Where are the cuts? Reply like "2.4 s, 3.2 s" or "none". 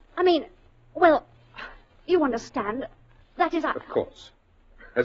none